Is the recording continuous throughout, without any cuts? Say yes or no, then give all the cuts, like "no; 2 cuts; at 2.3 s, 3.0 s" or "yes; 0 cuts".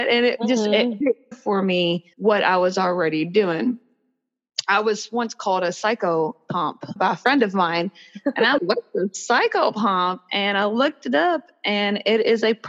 no; 5 cuts; at 1.0 s, 1.3 s, 2.1 s, 7.0 s, 8.6 s